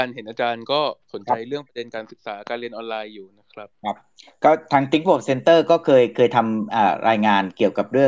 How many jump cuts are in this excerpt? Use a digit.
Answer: 2